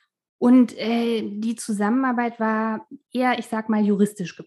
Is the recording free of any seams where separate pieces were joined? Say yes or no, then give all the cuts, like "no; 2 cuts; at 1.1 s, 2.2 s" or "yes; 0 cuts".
yes; 0 cuts